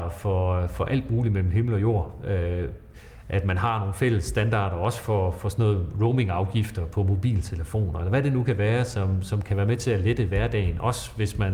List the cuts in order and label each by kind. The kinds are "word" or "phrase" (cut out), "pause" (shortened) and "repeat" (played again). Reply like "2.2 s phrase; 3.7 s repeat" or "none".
none